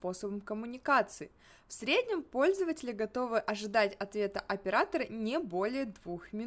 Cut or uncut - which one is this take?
uncut